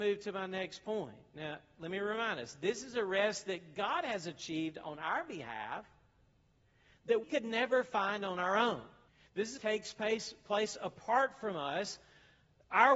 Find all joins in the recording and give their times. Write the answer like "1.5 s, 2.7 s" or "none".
7.2 s, 9.1 s, 9.6 s